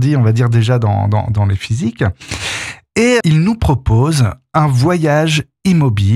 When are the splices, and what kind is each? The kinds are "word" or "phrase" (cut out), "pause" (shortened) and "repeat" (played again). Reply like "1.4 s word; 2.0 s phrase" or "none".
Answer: 3.2 s word